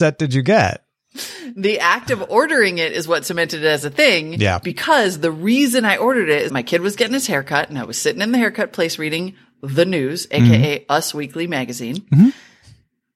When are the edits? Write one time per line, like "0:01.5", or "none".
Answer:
0:06.5